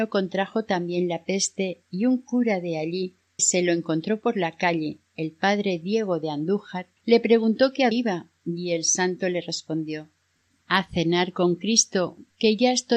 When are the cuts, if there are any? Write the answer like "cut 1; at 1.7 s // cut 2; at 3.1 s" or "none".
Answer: cut 1; at 3.4 s // cut 2; at 7.0 s // cut 3; at 7.9 s // cut 4; at 10.4 s

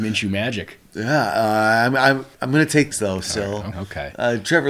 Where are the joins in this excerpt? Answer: cut 1; at 2.3 s // cut 2; at 2.9 s // cut 3; at 3.7 s

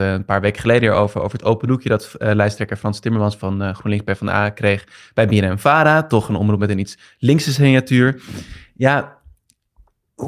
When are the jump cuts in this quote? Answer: none

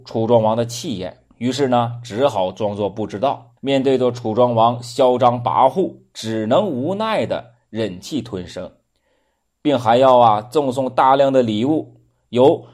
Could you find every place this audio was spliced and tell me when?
cut 1; at 1.3 s // cut 2; at 3.6 s

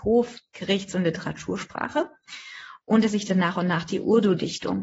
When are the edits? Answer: cut 1; at 3.1 s

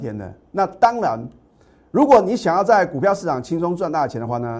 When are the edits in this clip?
none

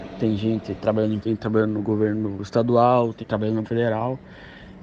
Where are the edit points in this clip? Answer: cut 1; at 1.2 s // cut 2; at 3.2 s // cut 3; at 3.6 s

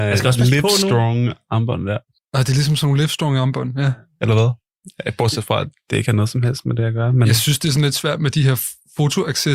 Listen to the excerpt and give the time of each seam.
none

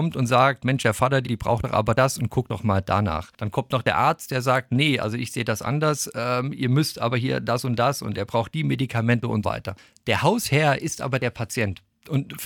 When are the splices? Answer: cut 1; at 1.3 s // cut 2; at 9.4 s

